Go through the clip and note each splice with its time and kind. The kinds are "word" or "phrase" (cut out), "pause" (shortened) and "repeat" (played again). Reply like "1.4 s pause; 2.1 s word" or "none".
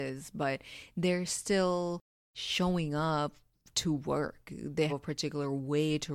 2.2 s pause; 4.9 s word